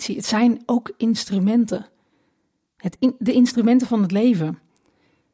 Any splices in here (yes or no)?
no